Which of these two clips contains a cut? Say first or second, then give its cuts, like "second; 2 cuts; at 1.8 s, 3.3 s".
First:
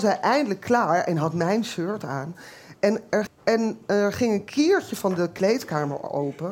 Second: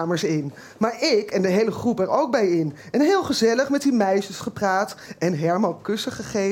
first; 2 cuts; at 2.8 s, 3.3 s